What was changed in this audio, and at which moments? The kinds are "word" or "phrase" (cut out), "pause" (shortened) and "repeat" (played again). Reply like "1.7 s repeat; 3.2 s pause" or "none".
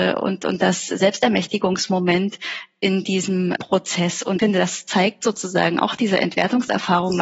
3.6 s word; 4.4 s word